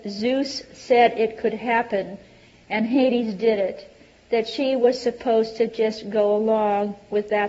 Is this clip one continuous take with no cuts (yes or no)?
yes